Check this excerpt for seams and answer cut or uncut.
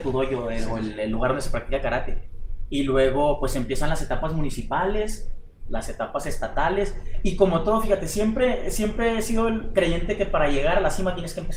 uncut